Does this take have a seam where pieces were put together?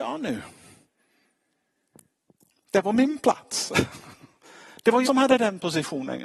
yes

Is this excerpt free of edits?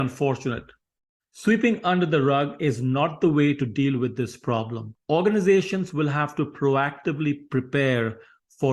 yes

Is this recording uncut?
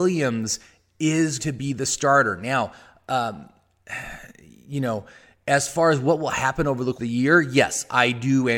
no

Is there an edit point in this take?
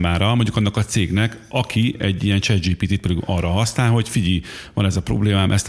no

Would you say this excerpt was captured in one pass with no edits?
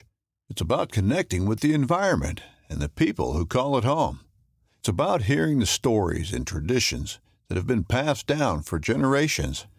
yes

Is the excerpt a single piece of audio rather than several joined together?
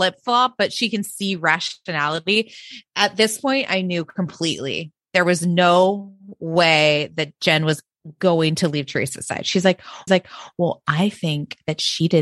no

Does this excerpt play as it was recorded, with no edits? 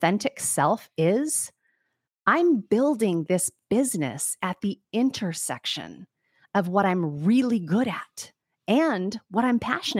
yes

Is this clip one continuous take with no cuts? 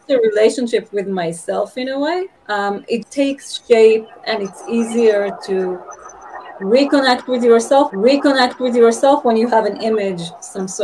no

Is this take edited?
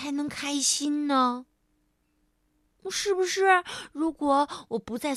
no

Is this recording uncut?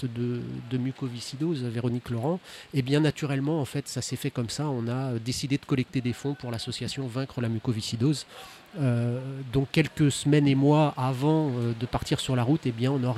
yes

